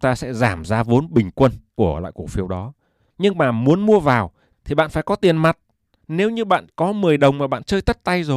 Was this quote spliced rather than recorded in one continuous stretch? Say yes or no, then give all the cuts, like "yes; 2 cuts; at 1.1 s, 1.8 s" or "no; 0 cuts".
no; 0 cuts